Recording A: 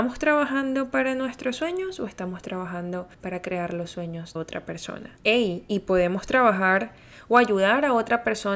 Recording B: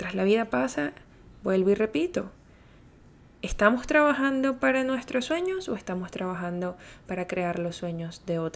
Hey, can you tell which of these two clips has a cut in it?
A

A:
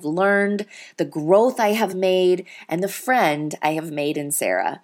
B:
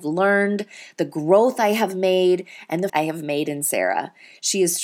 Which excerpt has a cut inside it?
B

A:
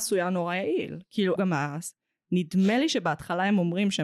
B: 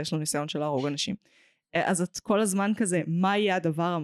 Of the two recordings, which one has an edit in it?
A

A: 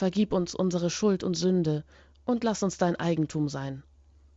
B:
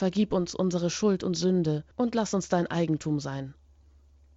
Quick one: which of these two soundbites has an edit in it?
B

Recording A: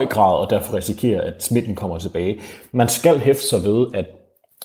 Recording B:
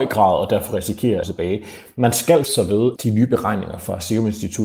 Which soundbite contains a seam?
B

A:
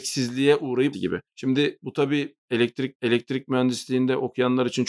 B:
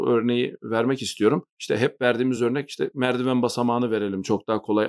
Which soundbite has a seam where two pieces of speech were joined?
A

